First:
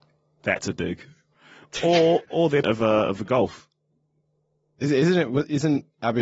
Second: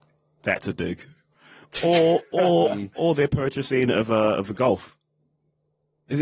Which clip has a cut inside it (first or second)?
first